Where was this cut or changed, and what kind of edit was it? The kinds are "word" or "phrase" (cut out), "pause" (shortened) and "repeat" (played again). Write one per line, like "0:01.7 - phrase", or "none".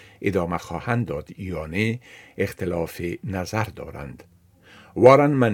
none